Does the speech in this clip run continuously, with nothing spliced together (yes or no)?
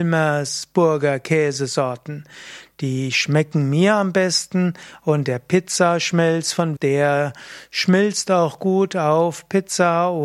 no